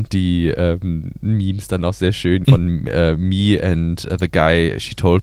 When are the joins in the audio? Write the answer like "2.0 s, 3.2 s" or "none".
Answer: 2.4 s